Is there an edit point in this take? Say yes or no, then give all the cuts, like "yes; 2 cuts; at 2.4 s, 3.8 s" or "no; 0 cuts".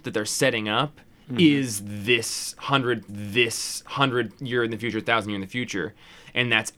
yes; 1 cut; at 3.1 s